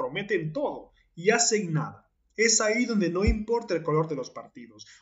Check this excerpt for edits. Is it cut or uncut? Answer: cut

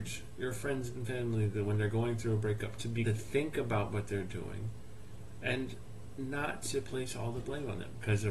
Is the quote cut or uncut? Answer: cut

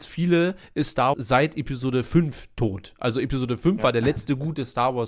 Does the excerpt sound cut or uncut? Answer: cut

